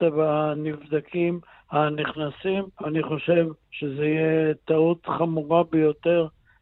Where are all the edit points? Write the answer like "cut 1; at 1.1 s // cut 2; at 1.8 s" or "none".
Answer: cut 1; at 2.7 s // cut 2; at 3.6 s